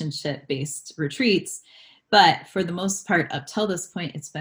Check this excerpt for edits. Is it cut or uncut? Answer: uncut